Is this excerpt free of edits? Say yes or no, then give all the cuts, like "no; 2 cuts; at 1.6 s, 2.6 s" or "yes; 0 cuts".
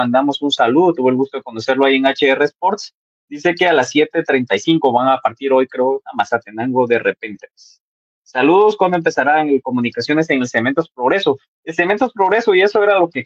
yes; 0 cuts